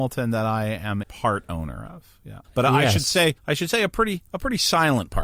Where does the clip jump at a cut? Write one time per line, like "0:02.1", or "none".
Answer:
0:01.0
0:02.4
0:03.4
0:04.3